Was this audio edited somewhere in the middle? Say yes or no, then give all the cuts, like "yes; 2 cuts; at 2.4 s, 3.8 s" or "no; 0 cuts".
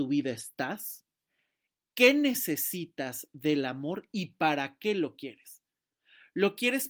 no; 0 cuts